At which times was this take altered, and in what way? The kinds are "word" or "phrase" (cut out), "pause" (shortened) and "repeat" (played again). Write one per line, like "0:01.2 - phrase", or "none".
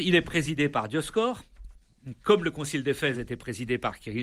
none